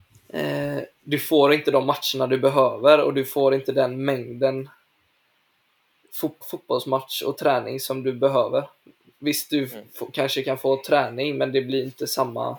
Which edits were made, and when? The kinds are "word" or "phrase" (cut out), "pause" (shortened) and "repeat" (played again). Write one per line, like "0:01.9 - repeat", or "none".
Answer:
0:06.4 - word